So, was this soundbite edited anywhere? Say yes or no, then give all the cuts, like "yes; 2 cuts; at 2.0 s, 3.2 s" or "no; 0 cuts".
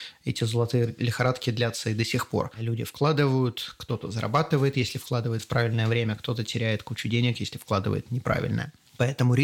no; 0 cuts